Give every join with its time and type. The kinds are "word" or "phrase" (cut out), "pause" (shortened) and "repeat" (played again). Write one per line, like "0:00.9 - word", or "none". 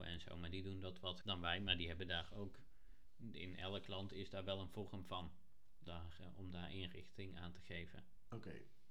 0:01.2 - word
0:05.9 - word